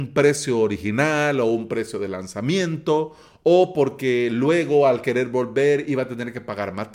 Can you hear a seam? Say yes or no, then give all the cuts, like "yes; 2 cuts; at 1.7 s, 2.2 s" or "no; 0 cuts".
no; 0 cuts